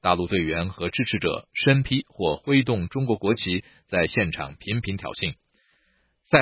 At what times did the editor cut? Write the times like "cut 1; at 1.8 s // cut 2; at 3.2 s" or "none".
none